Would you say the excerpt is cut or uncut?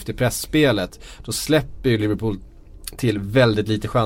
uncut